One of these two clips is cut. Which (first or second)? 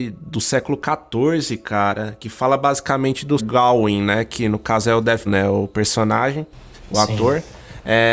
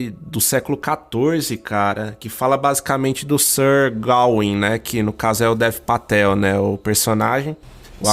first